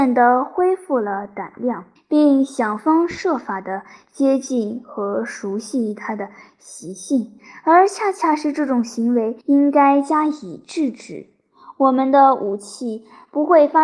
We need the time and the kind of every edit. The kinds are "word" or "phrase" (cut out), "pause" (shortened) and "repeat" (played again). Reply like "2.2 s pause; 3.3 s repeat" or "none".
2.0 s pause; 9.4 s pause